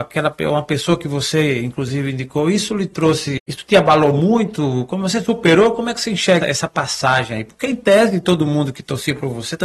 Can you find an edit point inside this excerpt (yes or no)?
yes